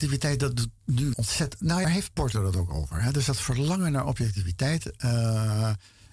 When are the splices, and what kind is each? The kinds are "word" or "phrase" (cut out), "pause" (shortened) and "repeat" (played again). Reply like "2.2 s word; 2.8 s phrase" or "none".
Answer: 1.1 s word; 1.8 s phrase